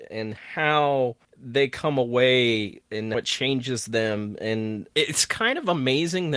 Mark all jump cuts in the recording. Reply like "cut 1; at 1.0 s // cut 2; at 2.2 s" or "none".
cut 1; at 1.2 s // cut 2; at 3.1 s // cut 3; at 4.9 s